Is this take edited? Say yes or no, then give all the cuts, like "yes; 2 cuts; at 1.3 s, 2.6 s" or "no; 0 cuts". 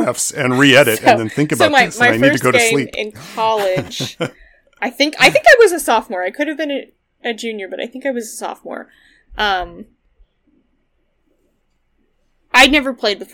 no; 0 cuts